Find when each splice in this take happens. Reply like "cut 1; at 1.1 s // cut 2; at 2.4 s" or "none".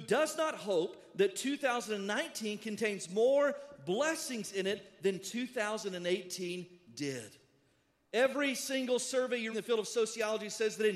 cut 1; at 9.5 s